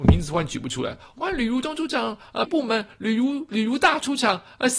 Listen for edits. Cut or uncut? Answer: cut